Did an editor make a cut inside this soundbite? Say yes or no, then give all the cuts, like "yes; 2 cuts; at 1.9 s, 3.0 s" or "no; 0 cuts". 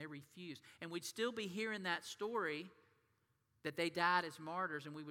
no; 0 cuts